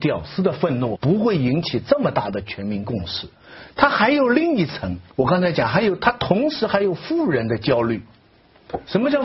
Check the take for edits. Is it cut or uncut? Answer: cut